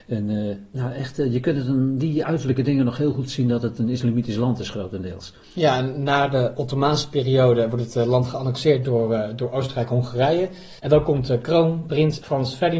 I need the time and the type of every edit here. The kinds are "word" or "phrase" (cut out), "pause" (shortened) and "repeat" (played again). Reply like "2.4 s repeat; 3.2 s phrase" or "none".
5.4 s pause; 10.8 s pause